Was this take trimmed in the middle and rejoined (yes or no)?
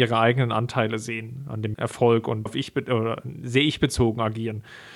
yes